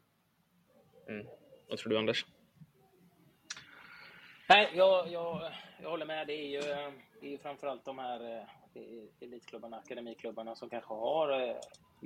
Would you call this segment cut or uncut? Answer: cut